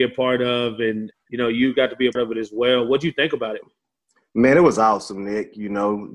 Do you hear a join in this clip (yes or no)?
yes